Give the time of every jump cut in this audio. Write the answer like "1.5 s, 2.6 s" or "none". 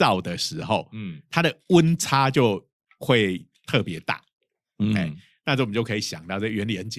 none